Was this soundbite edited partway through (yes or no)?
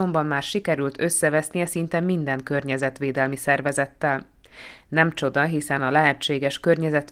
no